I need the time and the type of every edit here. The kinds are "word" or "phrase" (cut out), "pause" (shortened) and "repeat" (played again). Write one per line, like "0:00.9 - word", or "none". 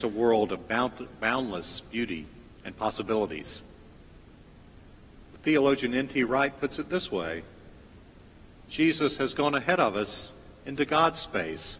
0:02.5 - pause